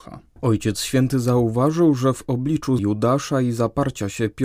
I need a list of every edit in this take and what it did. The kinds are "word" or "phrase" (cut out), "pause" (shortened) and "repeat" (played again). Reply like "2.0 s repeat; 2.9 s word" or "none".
2.8 s word